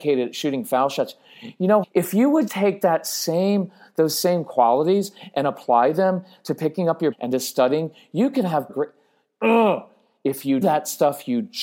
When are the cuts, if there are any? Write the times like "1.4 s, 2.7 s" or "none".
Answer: 1.8 s, 2.5 s, 7.1 s, 8.7 s, 10.6 s